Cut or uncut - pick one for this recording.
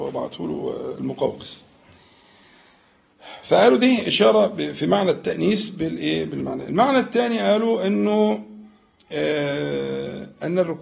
uncut